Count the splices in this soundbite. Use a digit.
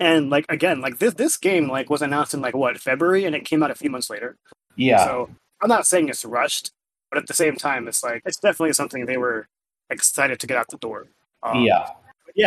1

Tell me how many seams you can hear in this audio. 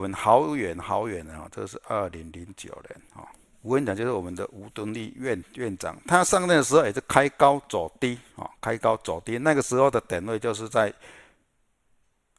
0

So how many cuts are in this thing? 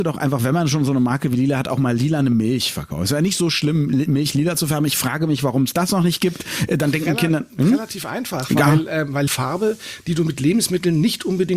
1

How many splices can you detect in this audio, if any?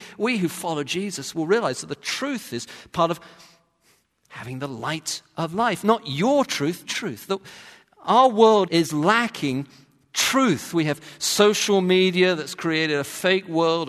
2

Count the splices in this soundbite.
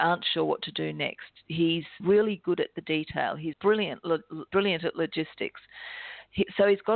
3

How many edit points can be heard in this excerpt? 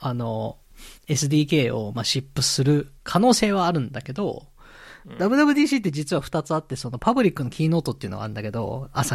2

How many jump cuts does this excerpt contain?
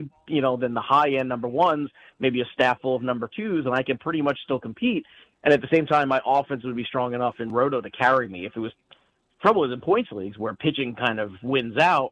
0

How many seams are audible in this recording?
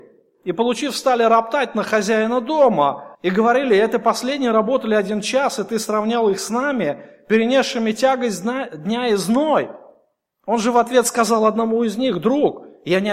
1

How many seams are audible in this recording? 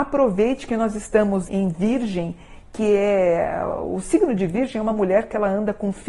1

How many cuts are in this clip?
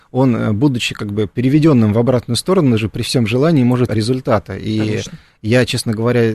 1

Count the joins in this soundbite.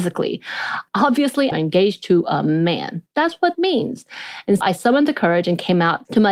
3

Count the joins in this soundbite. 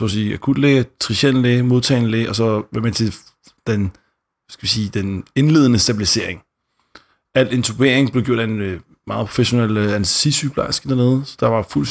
0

